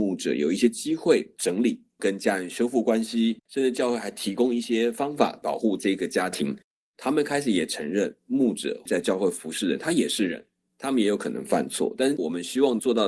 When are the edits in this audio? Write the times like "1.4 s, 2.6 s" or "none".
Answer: 3.4 s, 8.2 s